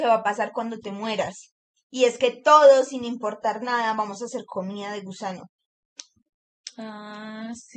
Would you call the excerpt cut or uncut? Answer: uncut